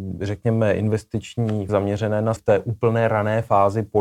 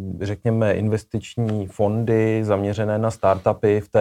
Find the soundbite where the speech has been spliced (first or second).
first